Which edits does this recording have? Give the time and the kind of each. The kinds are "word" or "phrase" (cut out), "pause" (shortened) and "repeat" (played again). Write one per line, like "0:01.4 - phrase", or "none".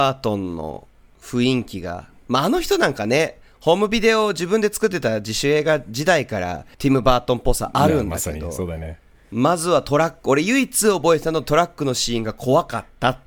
0:06.7 - pause